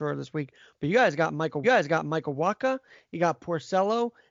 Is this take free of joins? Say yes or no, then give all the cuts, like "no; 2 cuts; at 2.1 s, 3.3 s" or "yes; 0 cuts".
no; 1 cut; at 1.6 s